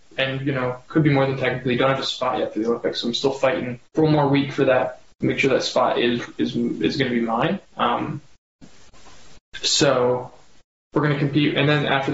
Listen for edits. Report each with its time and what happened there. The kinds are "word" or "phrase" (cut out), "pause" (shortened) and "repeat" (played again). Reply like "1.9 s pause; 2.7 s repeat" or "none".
3.8 s pause